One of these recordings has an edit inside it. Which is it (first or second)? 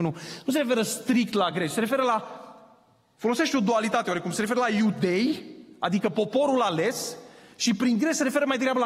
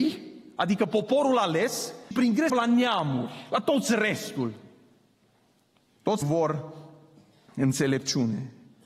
second